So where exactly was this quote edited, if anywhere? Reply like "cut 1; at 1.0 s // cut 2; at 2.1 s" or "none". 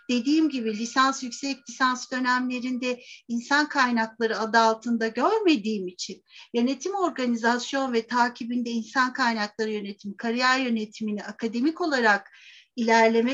none